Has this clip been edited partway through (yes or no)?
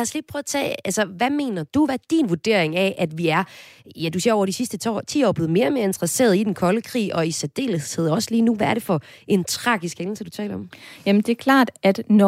no